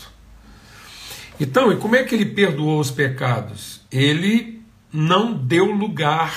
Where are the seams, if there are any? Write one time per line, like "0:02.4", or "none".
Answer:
none

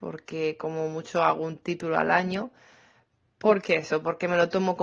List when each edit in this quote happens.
none

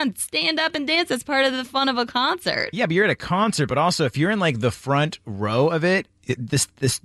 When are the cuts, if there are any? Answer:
none

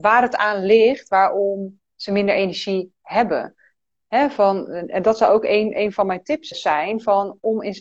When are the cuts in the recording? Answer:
0:06.5

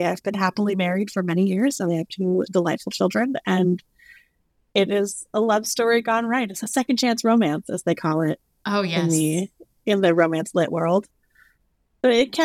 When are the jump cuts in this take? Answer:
none

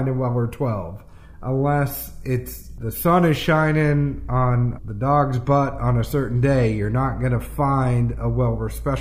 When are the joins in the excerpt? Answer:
none

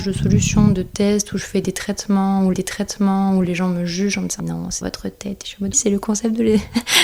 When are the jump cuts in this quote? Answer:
0:02.5
0:04.4
0:04.8
0:05.7

